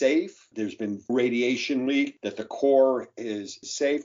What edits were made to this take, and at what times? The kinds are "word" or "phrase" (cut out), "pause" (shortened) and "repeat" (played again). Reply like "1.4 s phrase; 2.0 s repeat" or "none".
1.1 s word